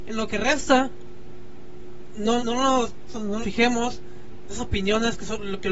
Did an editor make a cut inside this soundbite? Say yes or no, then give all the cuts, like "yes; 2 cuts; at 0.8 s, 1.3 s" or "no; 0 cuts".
yes; 4 cuts; at 2.4 s, 3.1 s, 3.4 s, 4.5 s